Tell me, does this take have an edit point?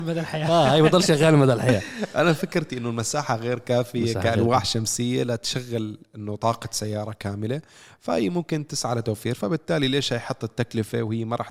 no; 0 cuts

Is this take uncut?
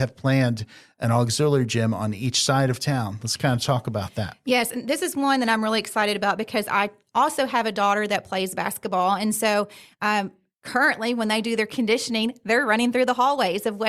yes; 0 cuts

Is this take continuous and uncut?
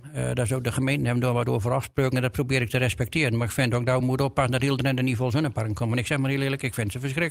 yes; 0 cuts

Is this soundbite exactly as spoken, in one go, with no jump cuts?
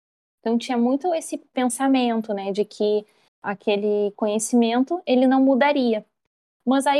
yes; 0 cuts

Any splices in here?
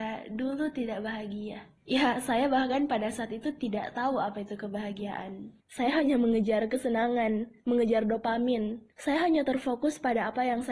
yes; 3 cuts; at 1.8 s, 5.6 s, 8.9 s

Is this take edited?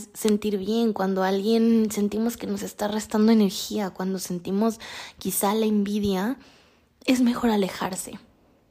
no; 0 cuts

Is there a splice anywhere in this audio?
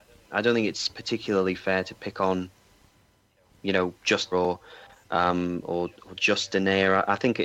yes; 1 cut; at 4.3 s

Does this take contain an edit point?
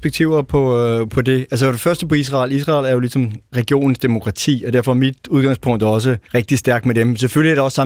yes; 2 cuts; at 3.5 s, 6.2 s

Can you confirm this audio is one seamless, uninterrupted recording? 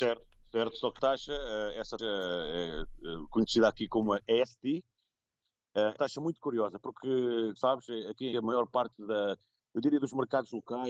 no; 5 cuts; at 1.0 s, 2.0 s, 6.0 s, 7.6 s, 8.3 s

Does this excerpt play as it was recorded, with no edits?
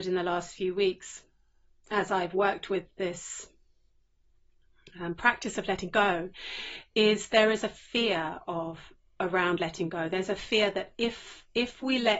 yes; 0 cuts

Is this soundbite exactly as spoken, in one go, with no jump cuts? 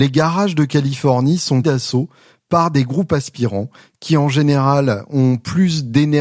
no; 1 cut; at 1.6 s

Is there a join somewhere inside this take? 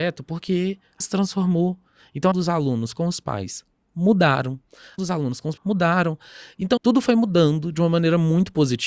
yes; 5 cuts; at 1.0 s, 2.3 s, 5.0 s, 5.6 s, 6.8 s

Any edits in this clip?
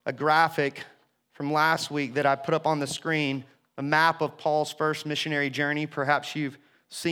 no; 0 cuts

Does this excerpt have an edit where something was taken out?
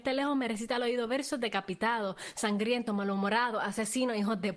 no; 0 cuts

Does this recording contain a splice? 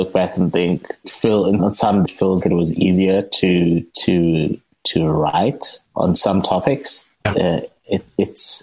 yes; 7 cuts; at 1.0 s, 1.6 s, 2.0 s, 2.4 s, 3.9 s, 5.9 s, 7.1 s

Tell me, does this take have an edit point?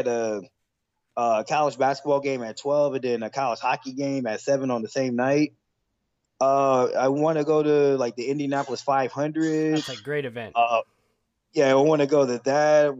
no; 0 cuts

